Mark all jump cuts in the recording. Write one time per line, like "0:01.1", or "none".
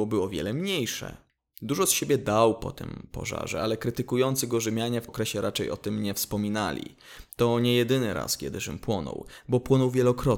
0:05.1

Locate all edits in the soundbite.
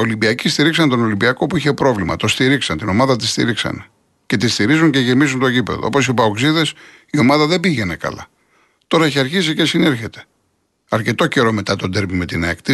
none

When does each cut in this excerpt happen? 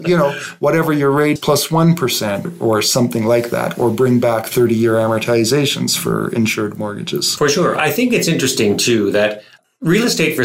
0:01.4

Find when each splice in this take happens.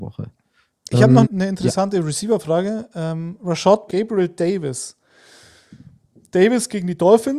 0:01.2
0:03.9

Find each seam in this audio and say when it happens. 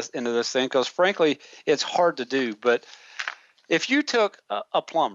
none

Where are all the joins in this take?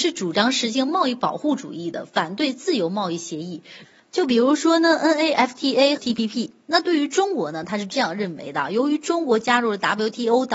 0:06.0

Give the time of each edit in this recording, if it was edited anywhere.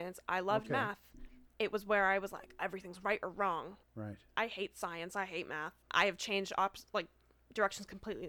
0:01.5
0:02.6
0:03.8
0:05.8

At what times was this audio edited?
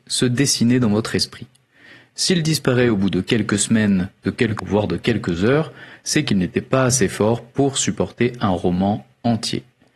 0:04.6

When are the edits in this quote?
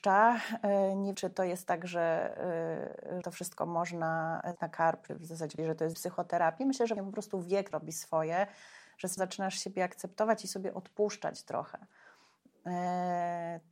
0:01.1
0:03.2
0:04.6
0:05.1
0:05.6
0:05.9
0:07.0
0:07.7
0:09.2

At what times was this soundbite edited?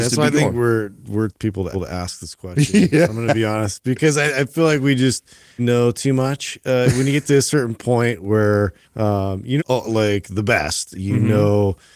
0:01.3
0:01.7
0:05.6
0:08.8
0:09.6

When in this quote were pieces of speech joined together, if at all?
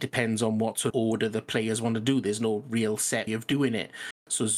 0:00.9
0:03.3

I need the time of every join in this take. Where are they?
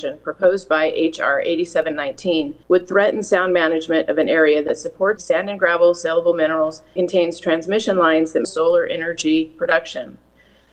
0:02.6
0:05.2
0:07.0
0:08.4

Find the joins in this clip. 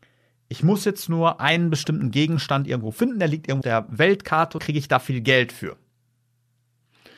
0:03.6
0:04.6

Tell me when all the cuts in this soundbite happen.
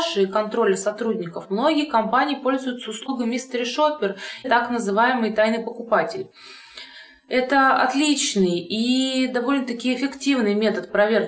0:04.4

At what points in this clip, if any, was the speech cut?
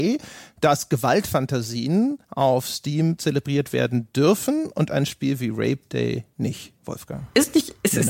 0:02.2
0:06.8

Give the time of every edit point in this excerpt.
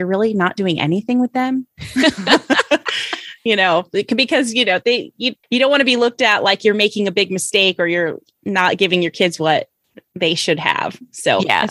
0:05.4

